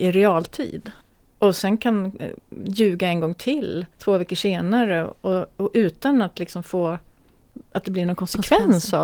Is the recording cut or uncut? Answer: cut